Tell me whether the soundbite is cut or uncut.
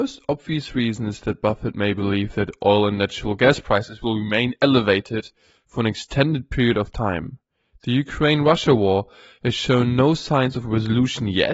uncut